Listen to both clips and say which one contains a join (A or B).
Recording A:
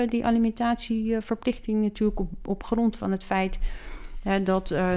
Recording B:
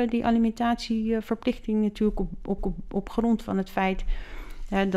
B